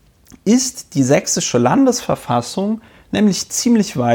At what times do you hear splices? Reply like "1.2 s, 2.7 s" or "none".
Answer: none